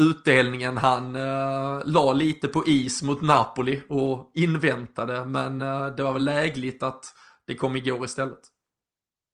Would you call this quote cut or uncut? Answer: uncut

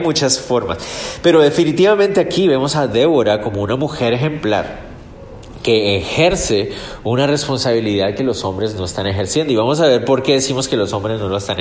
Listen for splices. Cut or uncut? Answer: uncut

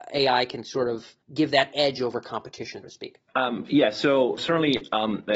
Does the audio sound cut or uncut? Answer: cut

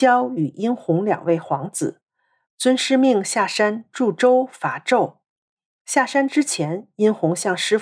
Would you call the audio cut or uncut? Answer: uncut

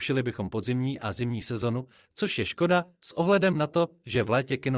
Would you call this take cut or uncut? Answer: uncut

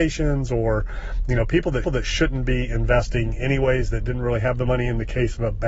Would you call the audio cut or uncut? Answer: cut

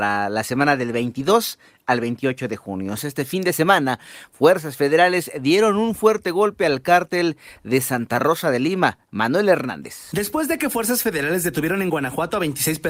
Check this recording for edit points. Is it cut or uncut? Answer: uncut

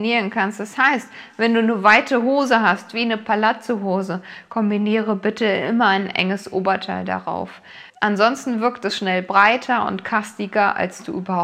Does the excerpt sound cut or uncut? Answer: cut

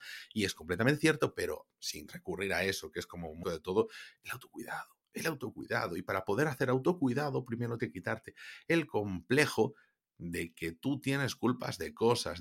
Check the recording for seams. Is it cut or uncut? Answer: cut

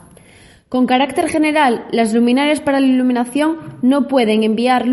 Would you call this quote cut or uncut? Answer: uncut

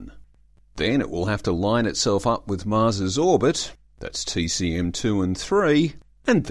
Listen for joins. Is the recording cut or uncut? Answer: uncut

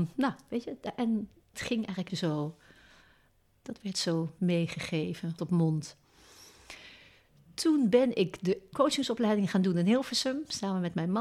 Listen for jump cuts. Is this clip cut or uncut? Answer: cut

